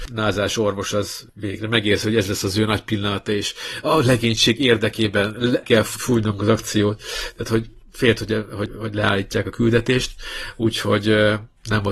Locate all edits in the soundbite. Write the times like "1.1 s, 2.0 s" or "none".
none